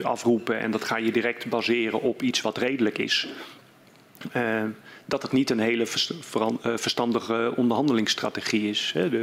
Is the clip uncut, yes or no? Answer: yes